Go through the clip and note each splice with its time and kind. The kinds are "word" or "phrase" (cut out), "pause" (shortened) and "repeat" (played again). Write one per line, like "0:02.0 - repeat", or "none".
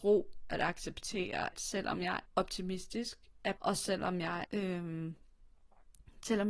0:01.5 - word
0:02.3 - word
0:03.6 - word
0:04.4 - word